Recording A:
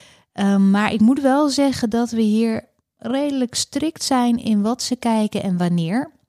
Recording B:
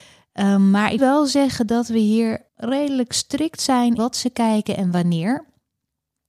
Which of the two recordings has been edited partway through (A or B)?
B